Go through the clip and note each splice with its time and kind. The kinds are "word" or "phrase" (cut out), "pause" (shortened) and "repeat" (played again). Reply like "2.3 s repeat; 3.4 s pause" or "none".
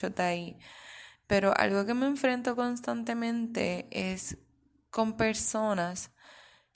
none